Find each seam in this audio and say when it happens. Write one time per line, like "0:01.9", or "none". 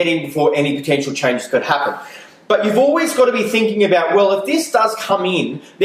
none